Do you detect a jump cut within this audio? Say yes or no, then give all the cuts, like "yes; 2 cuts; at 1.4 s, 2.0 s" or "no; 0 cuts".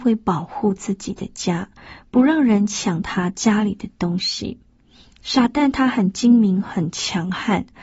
no; 0 cuts